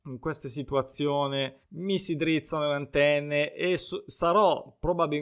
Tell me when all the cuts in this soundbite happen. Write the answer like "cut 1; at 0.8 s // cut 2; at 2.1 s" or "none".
cut 1; at 1.6 s